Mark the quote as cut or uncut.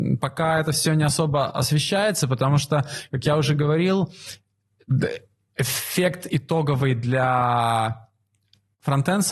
uncut